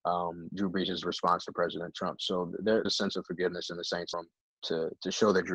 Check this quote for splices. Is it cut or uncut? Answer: cut